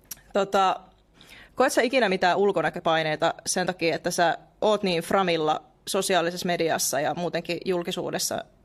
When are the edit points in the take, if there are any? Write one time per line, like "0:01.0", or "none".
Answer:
none